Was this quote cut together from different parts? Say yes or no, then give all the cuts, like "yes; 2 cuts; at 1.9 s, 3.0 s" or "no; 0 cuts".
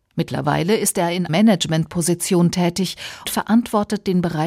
yes; 2 cuts; at 1.3 s, 3.3 s